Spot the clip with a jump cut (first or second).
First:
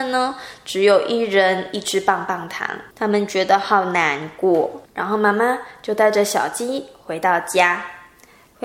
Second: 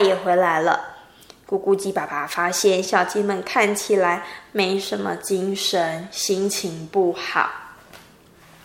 first